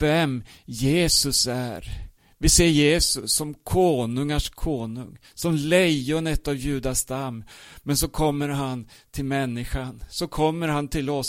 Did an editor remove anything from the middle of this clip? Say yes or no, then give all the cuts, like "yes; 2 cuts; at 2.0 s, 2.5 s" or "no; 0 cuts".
no; 0 cuts